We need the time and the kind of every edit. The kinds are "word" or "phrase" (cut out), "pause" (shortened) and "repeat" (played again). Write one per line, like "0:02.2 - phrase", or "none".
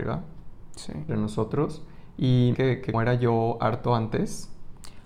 0:01.1 - word
0:02.5 - phrase
0:02.9 - word

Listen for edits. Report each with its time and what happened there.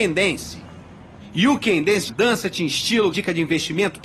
0:02.1 - word
0:03.1 - word

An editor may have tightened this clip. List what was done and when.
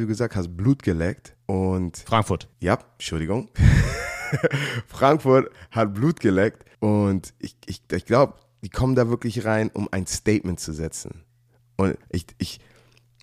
0:01.4 - pause
0:02.5 - pause
0:06.7 - pause
0:12.0 - pause

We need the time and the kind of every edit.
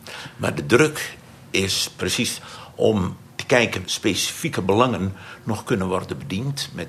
0:03.3 - word
0:03.8 - word

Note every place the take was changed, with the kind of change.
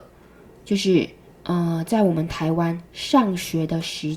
0:01.3 - pause

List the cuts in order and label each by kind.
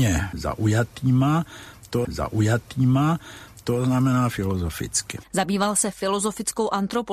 0:02.0 - repeat

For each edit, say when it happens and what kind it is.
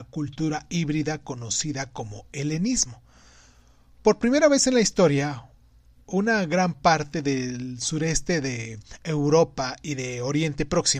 none

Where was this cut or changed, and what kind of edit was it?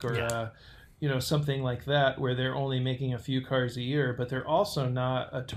none

